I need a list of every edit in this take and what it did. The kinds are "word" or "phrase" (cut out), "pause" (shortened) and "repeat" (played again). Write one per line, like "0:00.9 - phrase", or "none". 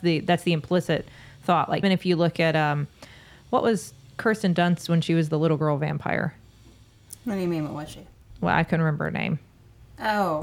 0:01.8 - word

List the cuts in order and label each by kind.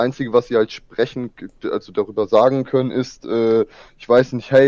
none

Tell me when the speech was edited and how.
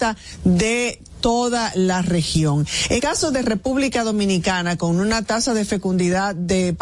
0:03.0 - word

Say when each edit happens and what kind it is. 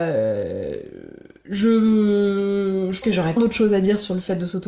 0:03.0 - word
0:03.4 - word

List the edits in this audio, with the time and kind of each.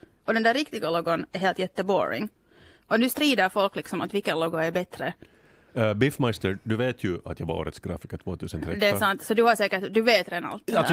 none

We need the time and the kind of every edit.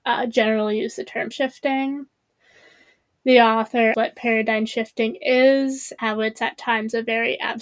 0:01.3 - word
0:03.9 - word
0:06.0 - word

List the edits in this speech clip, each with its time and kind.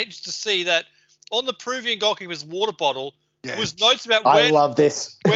none

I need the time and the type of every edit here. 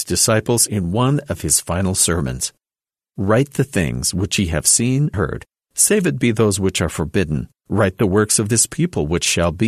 0:05.1 - word

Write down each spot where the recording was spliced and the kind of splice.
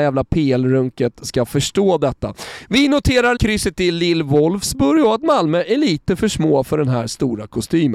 0:03.4 - word

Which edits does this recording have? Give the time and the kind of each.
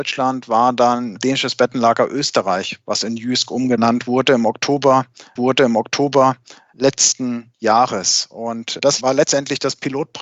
0:05.4 - repeat

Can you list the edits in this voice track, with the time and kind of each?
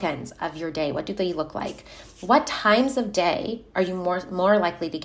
none

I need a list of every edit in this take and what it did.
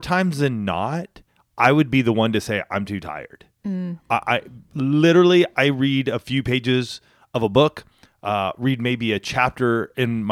none

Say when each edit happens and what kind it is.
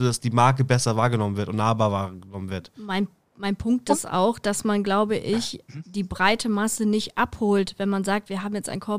none

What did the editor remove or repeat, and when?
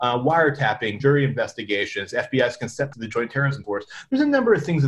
0:01.0 - word
0:02.9 - word
0:03.6 - word

